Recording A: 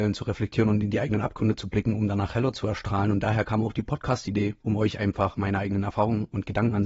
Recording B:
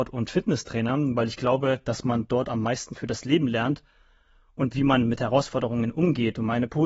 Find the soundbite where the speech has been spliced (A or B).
A